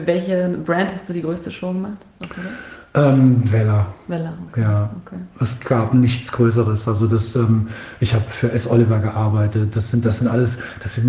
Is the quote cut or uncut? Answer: uncut